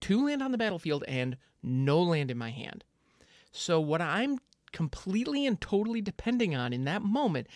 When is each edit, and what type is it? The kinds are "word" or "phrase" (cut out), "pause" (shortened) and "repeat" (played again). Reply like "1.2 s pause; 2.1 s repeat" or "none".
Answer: none